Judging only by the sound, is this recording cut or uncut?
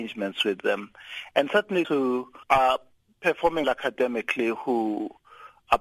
cut